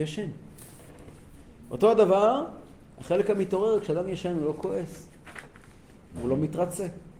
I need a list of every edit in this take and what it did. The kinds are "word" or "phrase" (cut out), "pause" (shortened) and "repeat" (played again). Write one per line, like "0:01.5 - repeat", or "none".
none